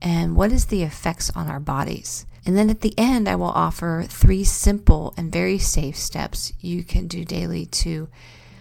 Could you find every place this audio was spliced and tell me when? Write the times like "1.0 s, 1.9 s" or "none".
2.4 s

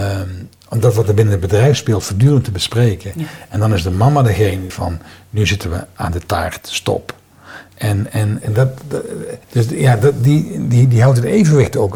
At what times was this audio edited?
4.7 s, 8.4 s, 9.4 s

